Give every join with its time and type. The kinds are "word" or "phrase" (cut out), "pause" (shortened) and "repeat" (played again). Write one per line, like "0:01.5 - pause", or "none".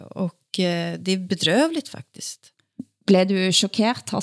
none